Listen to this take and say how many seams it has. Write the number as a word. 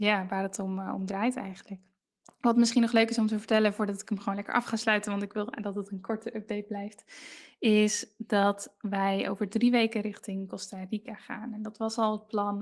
one